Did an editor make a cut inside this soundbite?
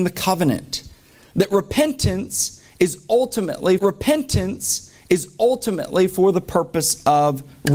yes; 1 cut; at 3.8 s

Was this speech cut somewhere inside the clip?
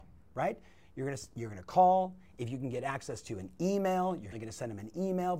yes; 1 cut; at 4.3 s

